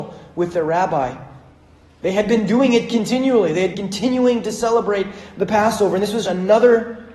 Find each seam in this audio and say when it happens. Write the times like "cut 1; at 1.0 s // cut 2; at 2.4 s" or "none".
cut 1; at 3.7 s // cut 2; at 6.2 s